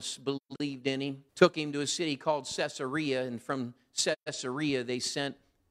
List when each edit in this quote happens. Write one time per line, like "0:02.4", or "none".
0:01.3